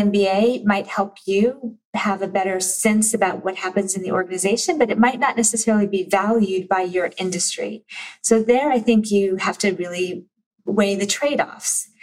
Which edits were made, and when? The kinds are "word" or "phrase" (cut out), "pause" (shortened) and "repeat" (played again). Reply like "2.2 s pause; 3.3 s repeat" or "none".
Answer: 1.8 s pause